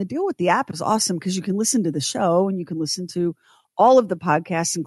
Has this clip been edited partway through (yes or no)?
no